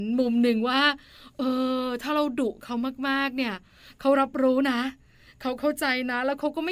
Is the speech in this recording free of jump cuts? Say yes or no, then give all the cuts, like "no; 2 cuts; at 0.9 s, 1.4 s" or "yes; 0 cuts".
yes; 0 cuts